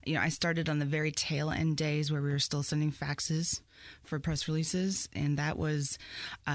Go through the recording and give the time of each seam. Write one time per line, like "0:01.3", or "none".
none